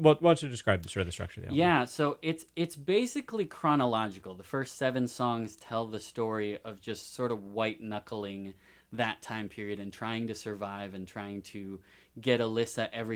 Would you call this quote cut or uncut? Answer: uncut